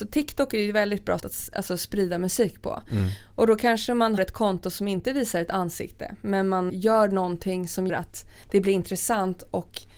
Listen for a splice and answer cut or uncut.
cut